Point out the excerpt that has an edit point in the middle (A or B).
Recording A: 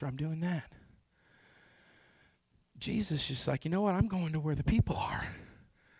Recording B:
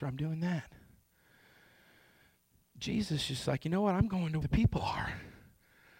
B